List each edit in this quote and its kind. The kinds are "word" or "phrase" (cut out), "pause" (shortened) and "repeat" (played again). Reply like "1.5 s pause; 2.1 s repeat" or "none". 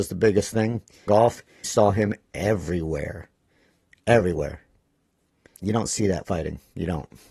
1.1 s word; 1.6 s word; 6.2 s word